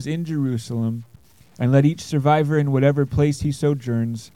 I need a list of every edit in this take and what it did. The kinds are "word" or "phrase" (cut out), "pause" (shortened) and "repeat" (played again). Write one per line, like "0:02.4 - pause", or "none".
none

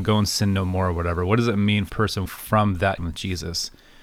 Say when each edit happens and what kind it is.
0:01.9 - word
0:02.3 - word
0:03.0 - word

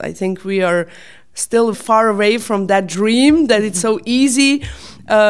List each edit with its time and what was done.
0:01.7 - word

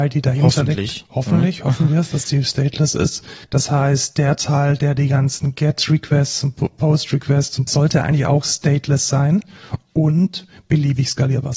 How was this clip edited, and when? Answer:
0:03.4 - pause
0:07.7 - phrase

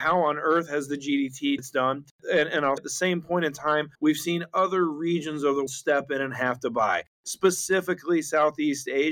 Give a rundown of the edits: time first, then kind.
0:01.6 - phrase
0:02.8 - word
0:03.9 - pause
0:05.7 - word

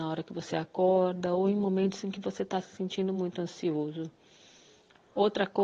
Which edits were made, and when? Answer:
none

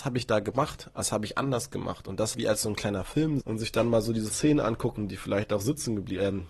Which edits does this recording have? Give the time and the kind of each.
0:02.3 - word
0:03.4 - word
0:04.3 - word

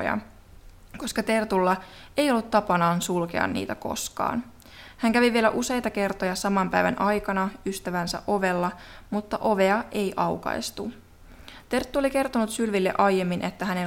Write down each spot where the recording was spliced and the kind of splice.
none

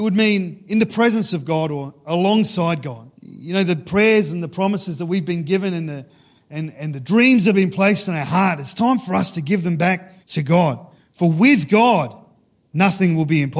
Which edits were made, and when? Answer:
0:03.2 - pause
0:06.7 - word
0:10.2 - pause
0:11.0 - pause

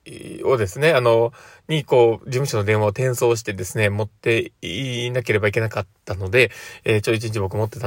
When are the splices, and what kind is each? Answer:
none

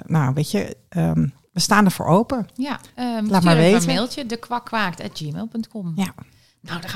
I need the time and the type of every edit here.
0:02.9 - pause

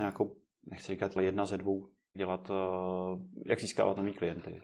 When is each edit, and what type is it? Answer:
0:01.2 - phrase
0:02.1 - phrase

